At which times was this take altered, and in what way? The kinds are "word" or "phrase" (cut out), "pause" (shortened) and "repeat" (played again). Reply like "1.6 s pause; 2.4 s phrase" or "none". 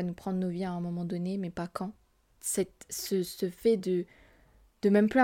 none